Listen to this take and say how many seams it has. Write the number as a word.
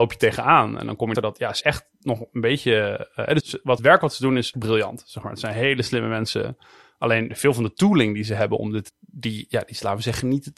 six